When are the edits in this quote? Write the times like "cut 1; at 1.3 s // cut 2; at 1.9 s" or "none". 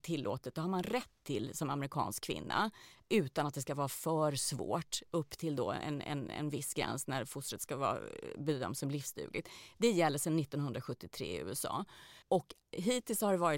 cut 1; at 12.2 s